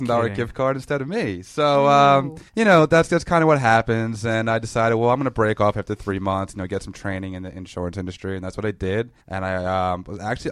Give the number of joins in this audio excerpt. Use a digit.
2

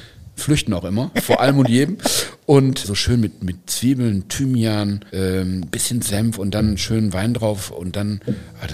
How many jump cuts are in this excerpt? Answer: 3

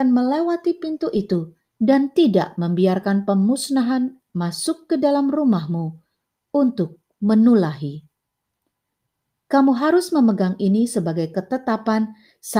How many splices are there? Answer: 1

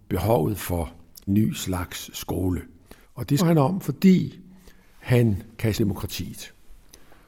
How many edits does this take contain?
4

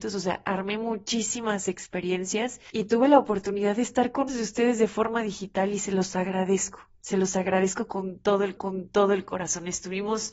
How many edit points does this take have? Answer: 2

